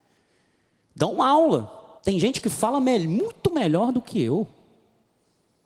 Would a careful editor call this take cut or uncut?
cut